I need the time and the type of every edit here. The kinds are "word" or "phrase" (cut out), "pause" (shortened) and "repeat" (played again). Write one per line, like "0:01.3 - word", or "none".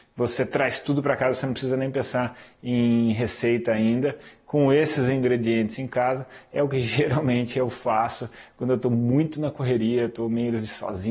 none